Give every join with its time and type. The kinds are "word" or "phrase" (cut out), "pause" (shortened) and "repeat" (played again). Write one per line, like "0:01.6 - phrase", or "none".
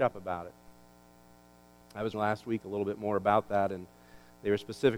0:02.1 - word